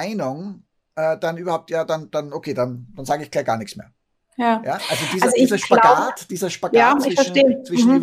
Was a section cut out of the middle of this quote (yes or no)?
yes